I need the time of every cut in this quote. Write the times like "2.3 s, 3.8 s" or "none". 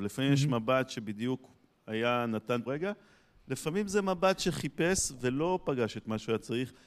2.7 s